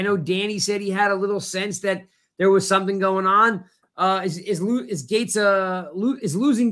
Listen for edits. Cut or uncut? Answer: uncut